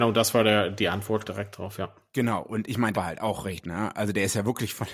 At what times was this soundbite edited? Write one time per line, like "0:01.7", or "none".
0:01.2
0:02.9
0:03.6